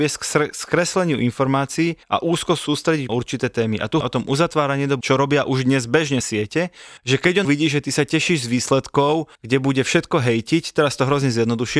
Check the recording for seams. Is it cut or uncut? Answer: cut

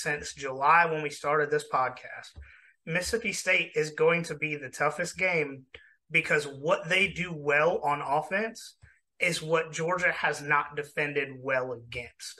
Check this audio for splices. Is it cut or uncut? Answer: uncut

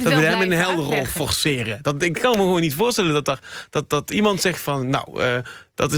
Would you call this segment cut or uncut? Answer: uncut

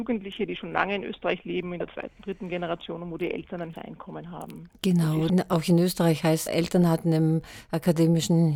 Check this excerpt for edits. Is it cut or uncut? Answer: cut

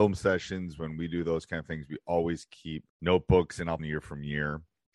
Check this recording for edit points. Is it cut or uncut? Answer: cut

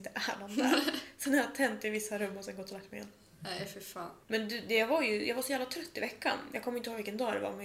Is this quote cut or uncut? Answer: cut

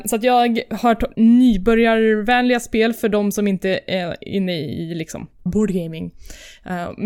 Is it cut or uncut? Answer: cut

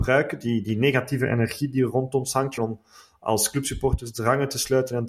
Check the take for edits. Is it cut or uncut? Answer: cut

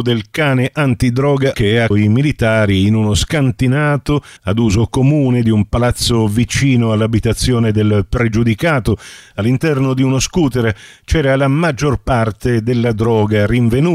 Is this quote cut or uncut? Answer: cut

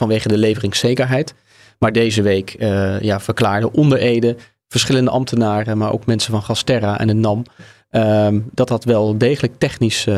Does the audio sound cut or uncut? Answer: uncut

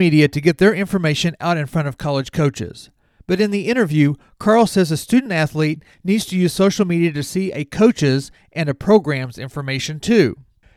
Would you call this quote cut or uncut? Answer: uncut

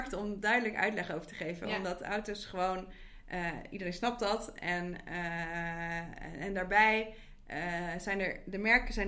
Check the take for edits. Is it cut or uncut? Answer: uncut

